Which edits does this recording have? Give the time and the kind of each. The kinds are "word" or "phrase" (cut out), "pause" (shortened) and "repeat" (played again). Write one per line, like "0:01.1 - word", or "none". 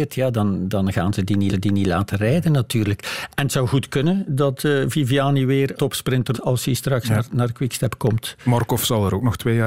0:01.5 - repeat
0:05.8 - word
0:06.3 - word